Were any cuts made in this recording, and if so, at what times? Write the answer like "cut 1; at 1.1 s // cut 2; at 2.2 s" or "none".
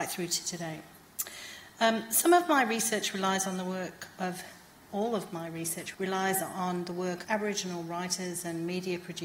cut 1; at 4.9 s // cut 2; at 5.9 s // cut 3; at 7.2 s